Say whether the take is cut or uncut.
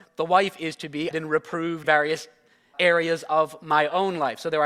cut